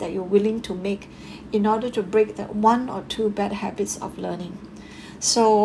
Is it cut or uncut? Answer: uncut